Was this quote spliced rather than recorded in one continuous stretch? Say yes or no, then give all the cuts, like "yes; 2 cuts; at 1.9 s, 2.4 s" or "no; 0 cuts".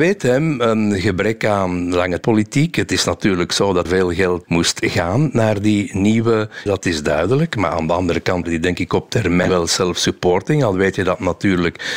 yes; 5 cuts; at 2.2 s, 3.8 s, 4.4 s, 6.7 s, 8.4 s